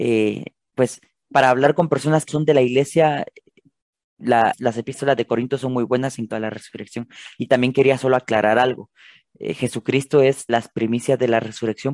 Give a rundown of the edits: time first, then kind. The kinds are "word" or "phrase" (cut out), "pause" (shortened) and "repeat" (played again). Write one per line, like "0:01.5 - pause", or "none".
0:02.3 - word
0:04.5 - word
0:06.3 - word
0:10.5 - word